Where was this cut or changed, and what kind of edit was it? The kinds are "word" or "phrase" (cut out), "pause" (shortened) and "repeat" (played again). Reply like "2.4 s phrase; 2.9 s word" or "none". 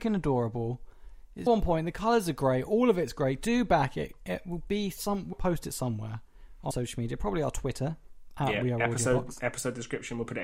1.5 s word; 5.3 s word; 6.7 s word